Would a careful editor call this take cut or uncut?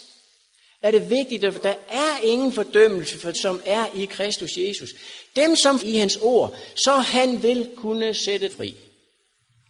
cut